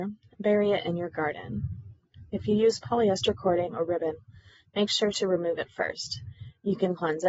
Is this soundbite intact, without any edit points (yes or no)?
yes